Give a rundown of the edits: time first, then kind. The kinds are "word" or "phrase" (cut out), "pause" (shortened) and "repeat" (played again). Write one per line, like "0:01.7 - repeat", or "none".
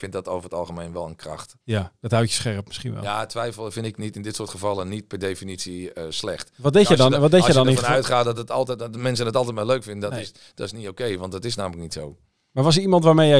0:01.6 - pause